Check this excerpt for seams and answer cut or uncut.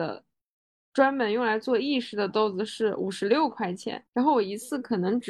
cut